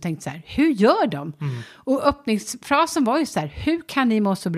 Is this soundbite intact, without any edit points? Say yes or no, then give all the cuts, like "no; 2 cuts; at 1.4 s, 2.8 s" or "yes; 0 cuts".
yes; 0 cuts